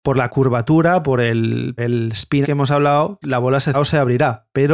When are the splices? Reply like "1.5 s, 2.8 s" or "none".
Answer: 1.8 s, 2.4 s, 3.2 s, 3.7 s